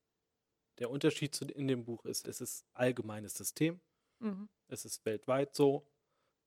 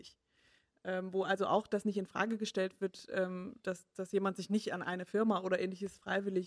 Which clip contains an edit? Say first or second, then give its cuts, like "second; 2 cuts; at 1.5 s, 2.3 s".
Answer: first; 2 cuts; at 2.2 s, 2.7 s